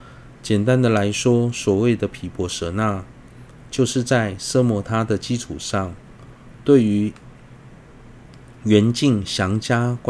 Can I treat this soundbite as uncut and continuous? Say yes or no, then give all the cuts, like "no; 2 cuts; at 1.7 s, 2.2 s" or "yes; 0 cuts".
yes; 0 cuts